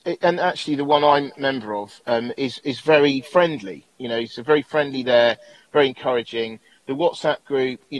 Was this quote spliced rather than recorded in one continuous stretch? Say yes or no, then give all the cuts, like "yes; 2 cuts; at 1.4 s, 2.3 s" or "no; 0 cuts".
no; 0 cuts